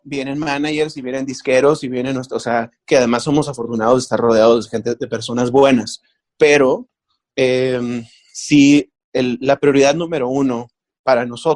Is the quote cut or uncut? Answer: uncut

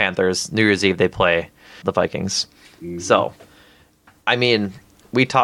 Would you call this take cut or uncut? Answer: cut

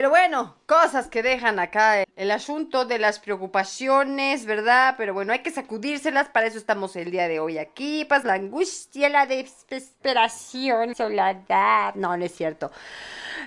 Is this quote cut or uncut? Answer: cut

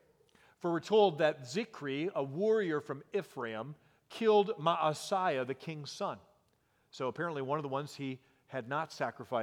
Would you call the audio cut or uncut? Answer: uncut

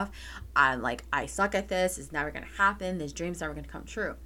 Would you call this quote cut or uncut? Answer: uncut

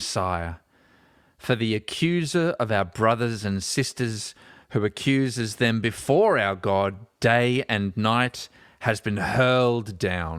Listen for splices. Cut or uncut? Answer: uncut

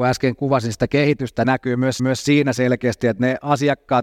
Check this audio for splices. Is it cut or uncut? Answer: cut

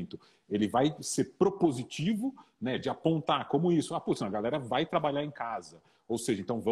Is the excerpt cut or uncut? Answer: uncut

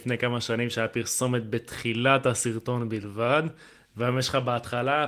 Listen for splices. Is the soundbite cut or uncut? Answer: uncut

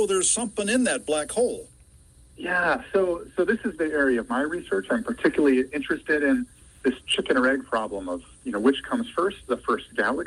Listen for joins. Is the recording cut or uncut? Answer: uncut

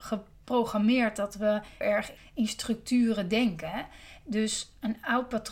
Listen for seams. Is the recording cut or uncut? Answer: cut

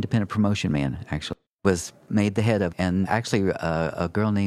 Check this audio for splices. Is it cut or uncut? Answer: cut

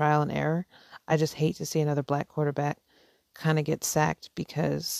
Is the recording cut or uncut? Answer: uncut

